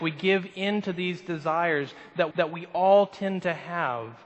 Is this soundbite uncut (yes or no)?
no